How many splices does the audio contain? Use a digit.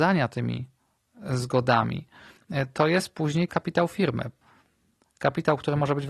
1